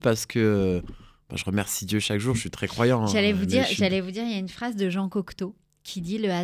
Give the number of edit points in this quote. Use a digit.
0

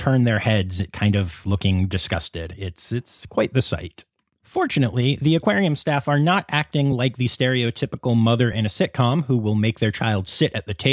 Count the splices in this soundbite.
0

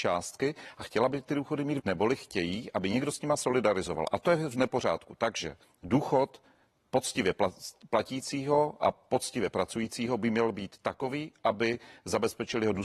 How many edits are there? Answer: 2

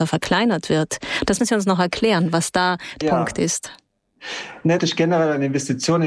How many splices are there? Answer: 3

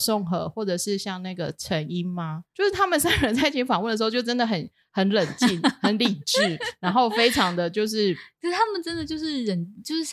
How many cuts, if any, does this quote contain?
0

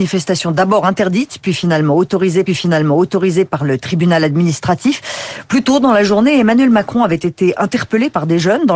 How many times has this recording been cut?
1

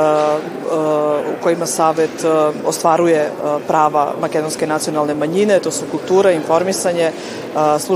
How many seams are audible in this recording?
0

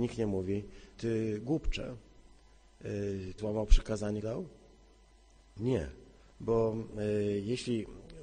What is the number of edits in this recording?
4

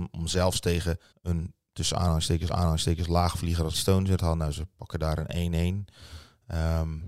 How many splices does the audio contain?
4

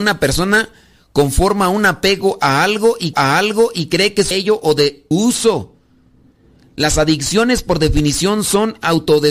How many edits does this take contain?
3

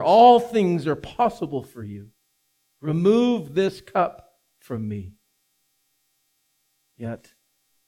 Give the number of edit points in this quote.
0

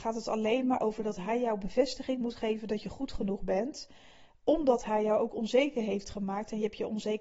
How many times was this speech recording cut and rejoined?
0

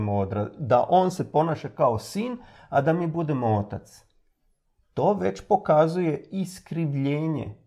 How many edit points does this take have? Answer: 0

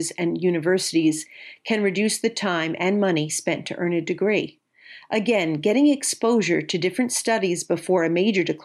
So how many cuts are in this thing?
0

